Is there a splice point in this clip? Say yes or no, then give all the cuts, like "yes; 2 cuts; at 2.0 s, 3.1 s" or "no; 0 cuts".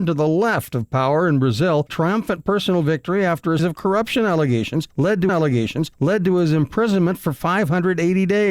yes; 3 cuts; at 1.9 s, 3.6 s, 5.3 s